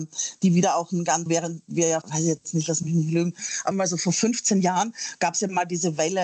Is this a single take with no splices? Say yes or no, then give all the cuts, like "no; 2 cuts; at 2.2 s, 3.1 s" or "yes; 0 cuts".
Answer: no; 3 cuts; at 1.3 s, 2.0 s, 3.7 s